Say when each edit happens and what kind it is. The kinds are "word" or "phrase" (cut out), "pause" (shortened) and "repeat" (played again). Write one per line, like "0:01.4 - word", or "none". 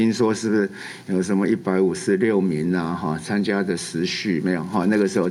none